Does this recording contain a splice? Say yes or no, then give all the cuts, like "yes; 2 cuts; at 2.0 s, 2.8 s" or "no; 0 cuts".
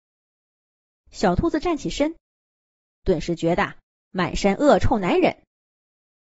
no; 0 cuts